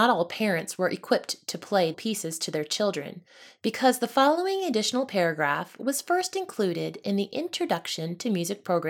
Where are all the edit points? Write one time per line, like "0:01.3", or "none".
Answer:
0:01.9